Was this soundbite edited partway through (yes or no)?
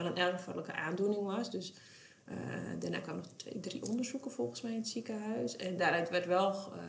no